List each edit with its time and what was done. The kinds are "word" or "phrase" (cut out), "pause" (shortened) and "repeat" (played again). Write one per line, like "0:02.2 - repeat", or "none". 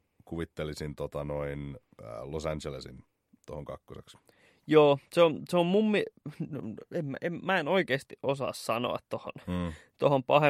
none

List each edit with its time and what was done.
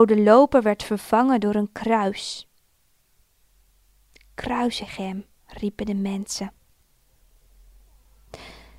0:05.4 - pause

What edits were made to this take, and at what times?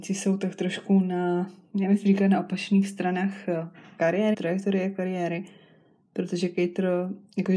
0:04.3 - word

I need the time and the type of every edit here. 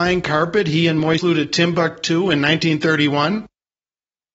0:01.2 - word

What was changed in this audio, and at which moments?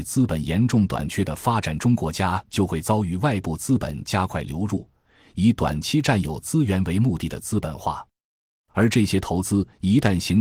none

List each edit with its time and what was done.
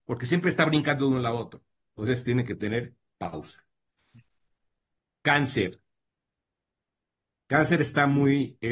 none

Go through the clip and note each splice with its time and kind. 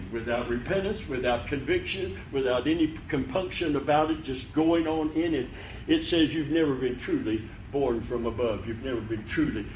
none

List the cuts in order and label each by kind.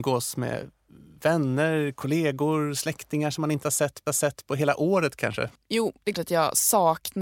0:04.1 - repeat
0:06.1 - word

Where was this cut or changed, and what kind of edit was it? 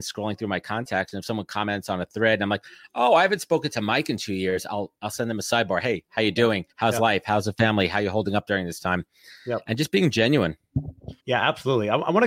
0:06.7 - pause
0:11.2 - pause

